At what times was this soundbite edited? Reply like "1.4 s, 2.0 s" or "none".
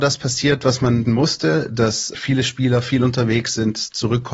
1.1 s, 2.1 s